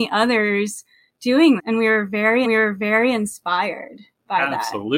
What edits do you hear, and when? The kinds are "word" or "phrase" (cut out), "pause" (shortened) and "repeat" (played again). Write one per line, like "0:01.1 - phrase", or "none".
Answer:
0:01.6 - word
0:02.4 - repeat